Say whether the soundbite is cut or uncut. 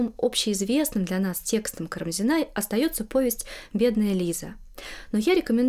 uncut